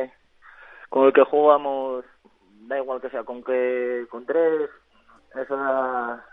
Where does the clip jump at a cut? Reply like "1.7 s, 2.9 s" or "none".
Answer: 3.4 s